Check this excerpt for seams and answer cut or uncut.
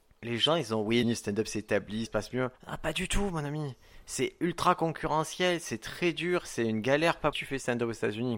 cut